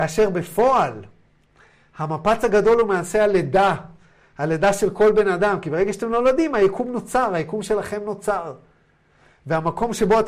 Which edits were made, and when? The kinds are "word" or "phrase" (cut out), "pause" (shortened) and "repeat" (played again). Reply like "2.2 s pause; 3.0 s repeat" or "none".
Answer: none